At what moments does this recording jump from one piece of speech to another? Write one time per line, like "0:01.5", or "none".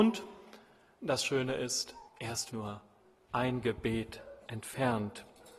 0:02.1
0:02.5
0:04.5